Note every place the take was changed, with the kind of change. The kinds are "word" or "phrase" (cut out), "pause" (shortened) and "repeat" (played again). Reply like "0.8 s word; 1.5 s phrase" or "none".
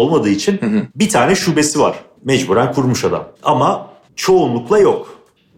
none